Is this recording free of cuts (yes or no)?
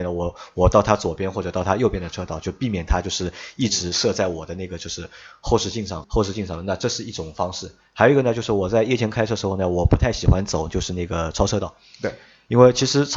no